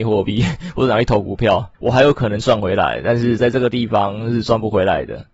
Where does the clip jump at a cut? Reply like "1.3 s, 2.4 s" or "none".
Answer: 1.7 s